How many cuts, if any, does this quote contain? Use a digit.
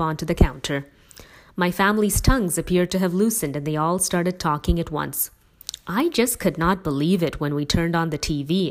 0